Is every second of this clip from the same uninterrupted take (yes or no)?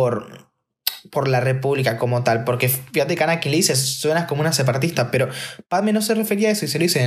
yes